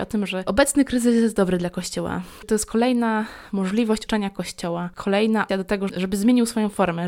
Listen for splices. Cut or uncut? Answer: cut